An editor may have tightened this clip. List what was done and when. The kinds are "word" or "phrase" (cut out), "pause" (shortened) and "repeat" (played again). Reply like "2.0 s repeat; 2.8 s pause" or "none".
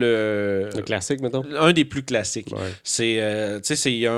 none